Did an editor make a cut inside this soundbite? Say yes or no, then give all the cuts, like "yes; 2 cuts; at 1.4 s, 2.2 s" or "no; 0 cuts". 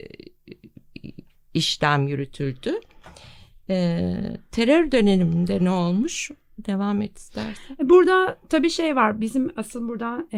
no; 0 cuts